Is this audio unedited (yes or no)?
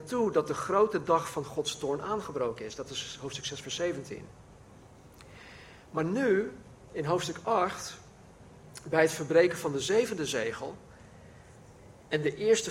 yes